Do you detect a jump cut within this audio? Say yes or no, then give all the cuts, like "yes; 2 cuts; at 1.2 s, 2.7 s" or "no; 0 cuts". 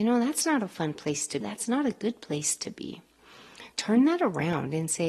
yes; 2 cuts; at 1.4 s, 3.7 s